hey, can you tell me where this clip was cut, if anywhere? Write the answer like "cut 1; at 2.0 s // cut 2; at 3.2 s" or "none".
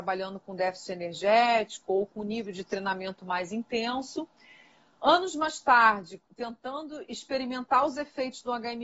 none